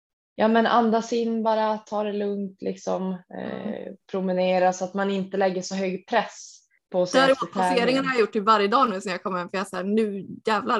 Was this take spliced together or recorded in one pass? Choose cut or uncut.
cut